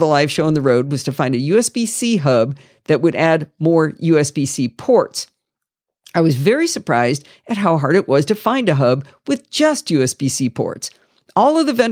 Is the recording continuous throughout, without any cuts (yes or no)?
yes